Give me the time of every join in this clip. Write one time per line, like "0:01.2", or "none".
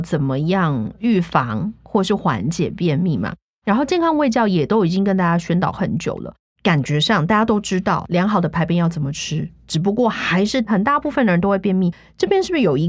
none